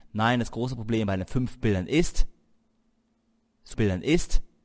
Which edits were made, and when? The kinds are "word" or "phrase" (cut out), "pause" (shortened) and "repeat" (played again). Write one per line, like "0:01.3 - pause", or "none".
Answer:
0:03.7 - repeat

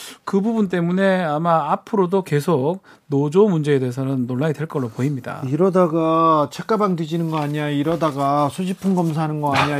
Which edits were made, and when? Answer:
none

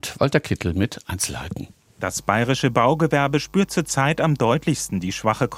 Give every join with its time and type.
none

